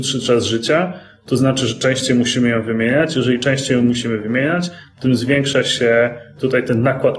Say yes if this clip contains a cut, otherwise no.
no